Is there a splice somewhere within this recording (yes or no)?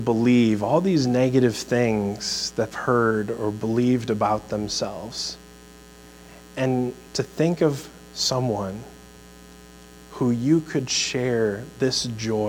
yes